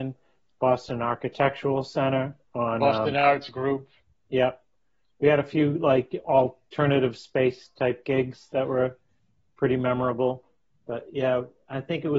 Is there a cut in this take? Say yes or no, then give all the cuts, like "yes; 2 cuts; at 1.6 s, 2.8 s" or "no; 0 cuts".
no; 0 cuts